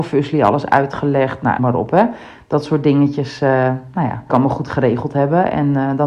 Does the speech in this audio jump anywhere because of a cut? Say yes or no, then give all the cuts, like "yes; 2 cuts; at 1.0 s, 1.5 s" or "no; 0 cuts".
yes; 2 cuts; at 1.6 s, 4.3 s